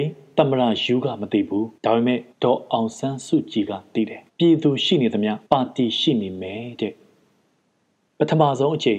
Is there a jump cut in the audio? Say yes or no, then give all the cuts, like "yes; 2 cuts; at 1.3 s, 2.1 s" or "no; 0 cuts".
yes; 4 cuts; at 1.8 s, 2.3 s, 4.3 s, 5.5 s